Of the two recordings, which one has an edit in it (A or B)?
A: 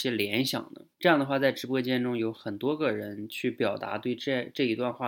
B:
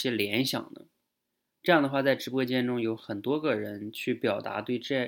A